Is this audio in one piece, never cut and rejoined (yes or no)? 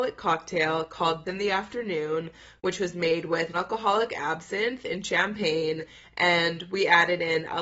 no